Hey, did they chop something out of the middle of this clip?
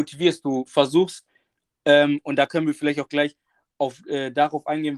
no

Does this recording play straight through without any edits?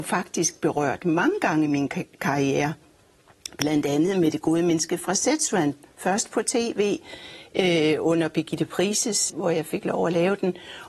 no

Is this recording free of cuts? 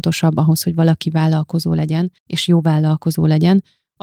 no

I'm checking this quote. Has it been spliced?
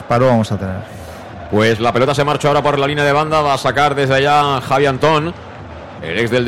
no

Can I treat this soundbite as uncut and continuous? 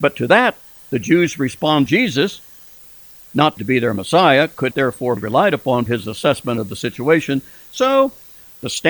no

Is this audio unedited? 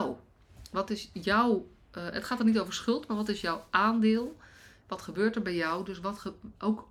yes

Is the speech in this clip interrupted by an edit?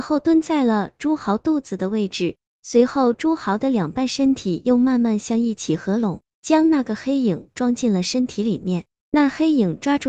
no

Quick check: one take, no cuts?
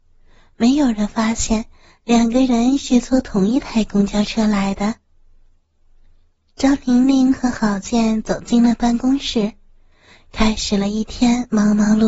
yes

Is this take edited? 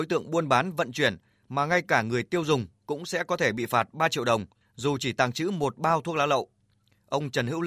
no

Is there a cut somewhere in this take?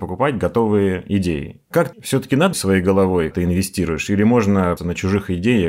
yes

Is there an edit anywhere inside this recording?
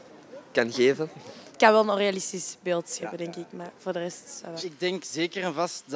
no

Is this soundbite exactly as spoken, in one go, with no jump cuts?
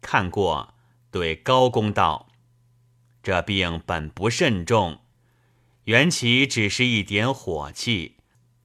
yes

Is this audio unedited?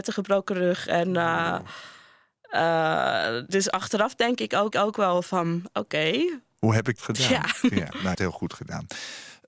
no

